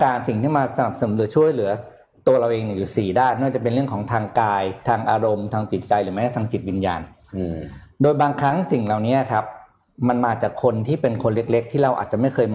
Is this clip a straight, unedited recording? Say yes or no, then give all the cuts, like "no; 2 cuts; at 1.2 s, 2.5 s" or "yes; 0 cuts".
yes; 0 cuts